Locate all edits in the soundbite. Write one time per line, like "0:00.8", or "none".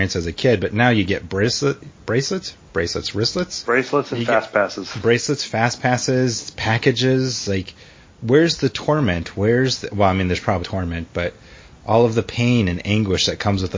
0:03.6
0:10.6